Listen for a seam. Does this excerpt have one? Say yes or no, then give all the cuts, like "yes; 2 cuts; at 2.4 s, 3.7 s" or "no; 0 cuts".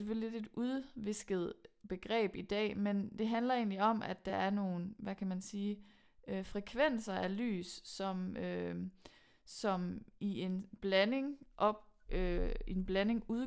no; 0 cuts